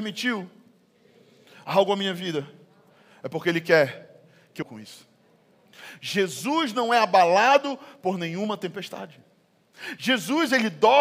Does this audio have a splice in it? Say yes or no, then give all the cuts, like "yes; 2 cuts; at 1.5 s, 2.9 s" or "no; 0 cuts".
yes; 1 cut; at 4.6 s